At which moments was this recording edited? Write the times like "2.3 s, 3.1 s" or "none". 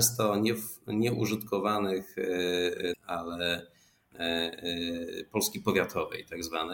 2.9 s